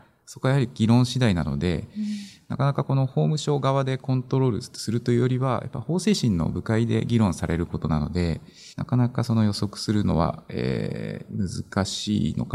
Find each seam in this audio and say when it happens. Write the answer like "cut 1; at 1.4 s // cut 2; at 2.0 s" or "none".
cut 1; at 8.7 s